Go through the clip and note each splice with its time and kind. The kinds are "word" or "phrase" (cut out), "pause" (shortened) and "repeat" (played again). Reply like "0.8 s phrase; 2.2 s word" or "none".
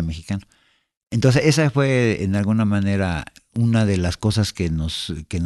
none

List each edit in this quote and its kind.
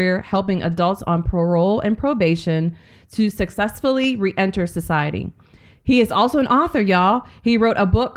none

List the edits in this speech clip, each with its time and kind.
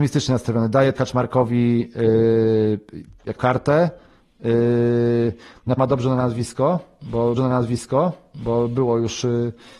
0.9 s word; 3.4 s phrase; 5.8 s word; 7.4 s repeat

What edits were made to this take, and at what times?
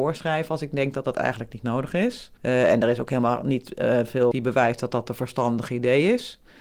2.4 s pause; 4.3 s word

